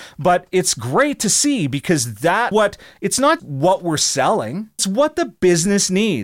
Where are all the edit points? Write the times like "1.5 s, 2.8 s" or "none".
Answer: 2.5 s, 3.4 s, 4.8 s